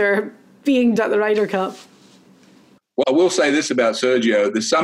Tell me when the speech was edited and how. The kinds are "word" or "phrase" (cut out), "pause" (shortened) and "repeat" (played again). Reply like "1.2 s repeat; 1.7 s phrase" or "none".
1.0 s word; 3.0 s phrase